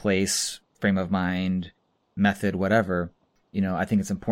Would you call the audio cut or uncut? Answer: uncut